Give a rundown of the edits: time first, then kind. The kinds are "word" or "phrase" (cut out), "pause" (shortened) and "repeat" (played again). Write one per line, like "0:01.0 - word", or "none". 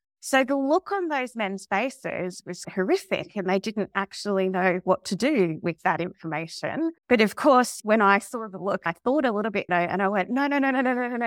0:02.6 - word
0:07.0 - pause
0:09.7 - word